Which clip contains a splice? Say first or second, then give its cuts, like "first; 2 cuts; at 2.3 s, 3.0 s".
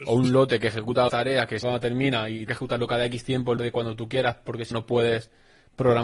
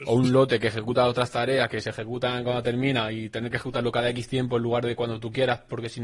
first; 5 cuts; at 1.1 s, 1.6 s, 2.5 s, 3.6 s, 4.7 s